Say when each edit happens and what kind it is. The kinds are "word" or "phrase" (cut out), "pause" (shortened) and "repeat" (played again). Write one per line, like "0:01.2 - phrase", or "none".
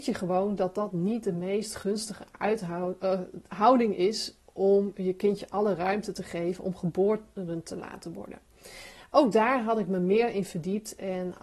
none